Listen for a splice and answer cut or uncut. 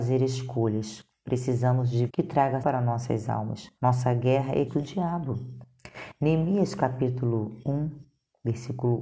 cut